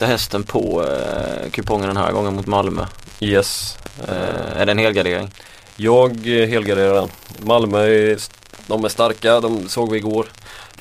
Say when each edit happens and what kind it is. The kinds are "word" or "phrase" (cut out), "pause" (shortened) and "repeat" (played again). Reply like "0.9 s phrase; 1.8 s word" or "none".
none